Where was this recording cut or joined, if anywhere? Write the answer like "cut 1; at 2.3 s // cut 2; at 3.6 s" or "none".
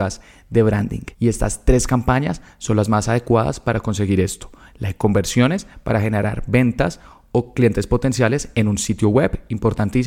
cut 1; at 1.1 s